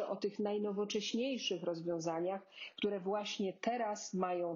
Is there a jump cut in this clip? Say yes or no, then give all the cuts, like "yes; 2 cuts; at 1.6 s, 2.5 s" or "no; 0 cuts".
no; 0 cuts